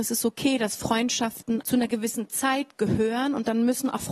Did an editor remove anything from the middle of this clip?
yes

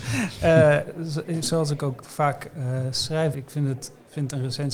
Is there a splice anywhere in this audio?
yes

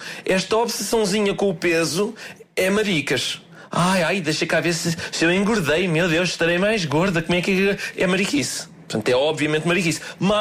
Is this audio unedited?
yes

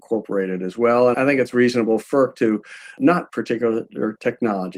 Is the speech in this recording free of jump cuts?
no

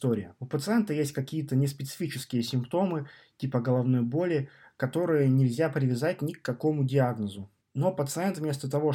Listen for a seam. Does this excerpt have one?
no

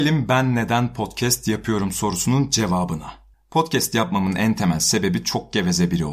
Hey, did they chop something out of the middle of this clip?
yes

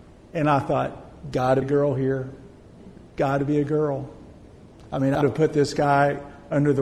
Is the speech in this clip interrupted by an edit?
yes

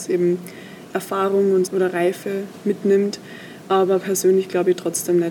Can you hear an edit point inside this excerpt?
yes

